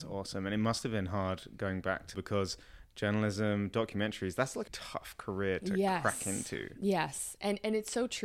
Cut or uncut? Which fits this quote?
cut